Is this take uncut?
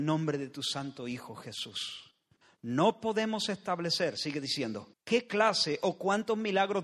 no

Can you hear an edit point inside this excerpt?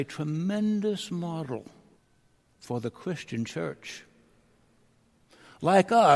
yes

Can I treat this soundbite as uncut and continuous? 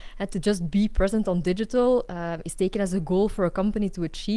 yes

